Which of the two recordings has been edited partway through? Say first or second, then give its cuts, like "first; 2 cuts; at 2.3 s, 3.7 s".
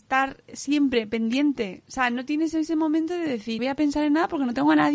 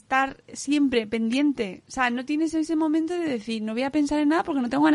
first; 1 cut; at 3.6 s